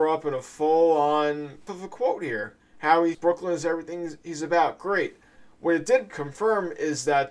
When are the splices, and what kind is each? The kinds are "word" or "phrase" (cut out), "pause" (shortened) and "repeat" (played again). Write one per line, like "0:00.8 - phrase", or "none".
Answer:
0:01.7 - word
0:02.6 - pause
0:03.1 - word
0:06.1 - word